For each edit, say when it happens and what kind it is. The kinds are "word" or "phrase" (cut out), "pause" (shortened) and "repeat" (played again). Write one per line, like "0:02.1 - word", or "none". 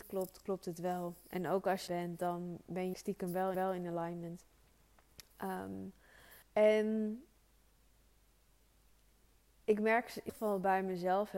0:01.9 - phrase
0:02.9 - phrase
0:03.5 - repeat
0:06.4 - pause
0:10.3 - word